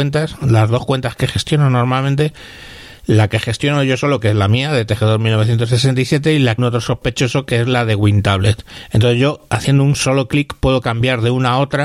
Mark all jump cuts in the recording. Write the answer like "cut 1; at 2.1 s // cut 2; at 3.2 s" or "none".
cut 1; at 6.6 s